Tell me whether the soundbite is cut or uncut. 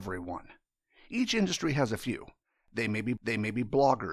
cut